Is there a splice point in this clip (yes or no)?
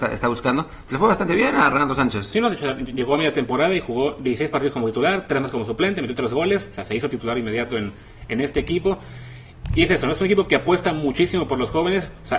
no